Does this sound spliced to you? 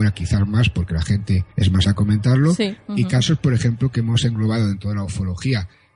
yes; 3 cuts; at 1.5 s, 1.8 s, 2.8 s

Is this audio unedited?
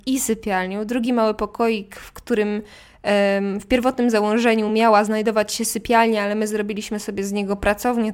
yes; 0 cuts

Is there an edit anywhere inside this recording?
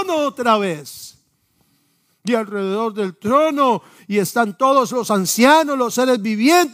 no; 0 cuts

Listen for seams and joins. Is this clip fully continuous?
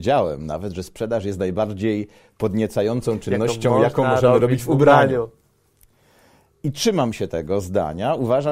yes; 0 cuts

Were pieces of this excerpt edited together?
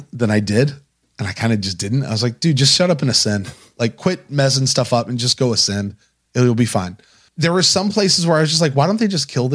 no; 0 cuts

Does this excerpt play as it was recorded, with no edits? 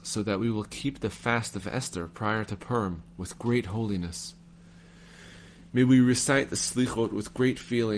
yes; 0 cuts

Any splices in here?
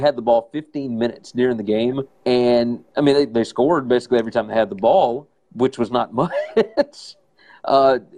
yes; 2 cuts; at 2.1 s, 5.4 s

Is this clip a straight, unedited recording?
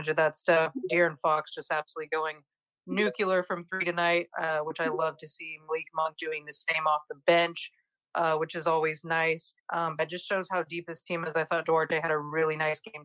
no; 2 cuts; at 9.6 s, 10.0 s

